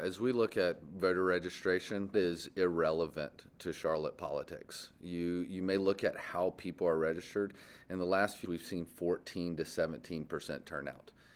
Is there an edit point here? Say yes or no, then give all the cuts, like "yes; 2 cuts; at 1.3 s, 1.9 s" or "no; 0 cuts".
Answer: yes; 2 cuts; at 2.1 s, 8.4 s